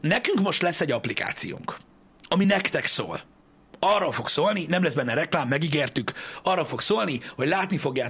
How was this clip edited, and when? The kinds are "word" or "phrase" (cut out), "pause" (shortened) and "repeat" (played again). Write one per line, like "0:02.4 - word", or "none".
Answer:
none